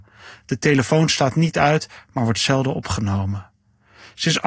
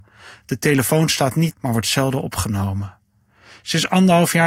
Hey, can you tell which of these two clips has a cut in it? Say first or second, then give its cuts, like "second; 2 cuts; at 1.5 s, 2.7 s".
second; 1 cut; at 1.5 s